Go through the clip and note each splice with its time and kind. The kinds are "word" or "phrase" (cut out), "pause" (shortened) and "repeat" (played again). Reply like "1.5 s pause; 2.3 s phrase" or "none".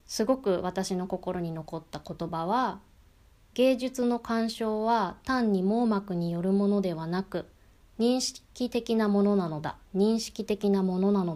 9.9 s pause